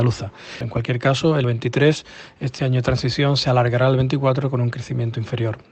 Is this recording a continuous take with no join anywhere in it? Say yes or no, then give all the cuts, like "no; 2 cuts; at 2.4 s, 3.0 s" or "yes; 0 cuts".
no; 1 cut; at 1.4 s